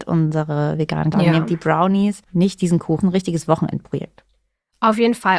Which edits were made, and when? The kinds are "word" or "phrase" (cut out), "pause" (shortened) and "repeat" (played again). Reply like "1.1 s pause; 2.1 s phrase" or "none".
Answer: 1.1 s word; 2.2 s pause; 3.0 s phrase